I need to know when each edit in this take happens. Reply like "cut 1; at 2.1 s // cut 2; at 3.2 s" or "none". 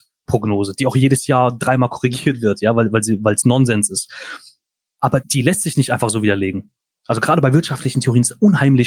cut 1; at 5.2 s